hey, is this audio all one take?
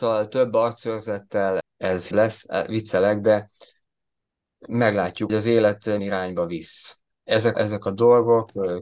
no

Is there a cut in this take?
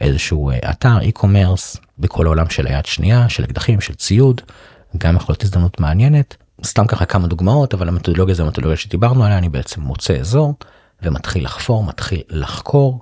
no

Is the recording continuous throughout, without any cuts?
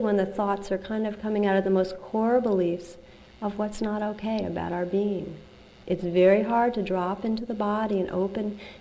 yes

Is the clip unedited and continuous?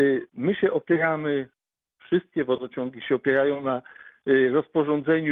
yes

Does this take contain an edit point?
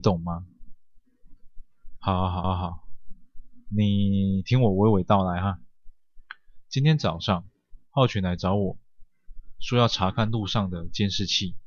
yes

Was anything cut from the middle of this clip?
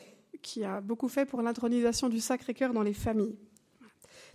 no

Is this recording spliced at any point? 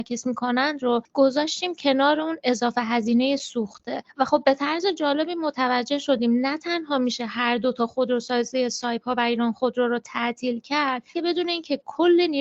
yes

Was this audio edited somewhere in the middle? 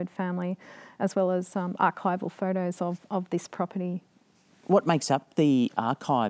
no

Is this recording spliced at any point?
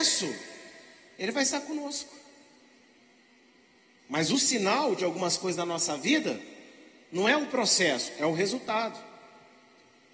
no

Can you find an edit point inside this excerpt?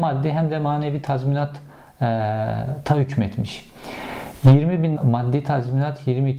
yes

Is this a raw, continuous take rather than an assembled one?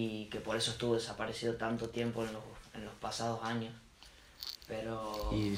yes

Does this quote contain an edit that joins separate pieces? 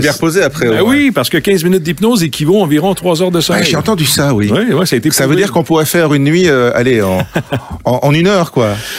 no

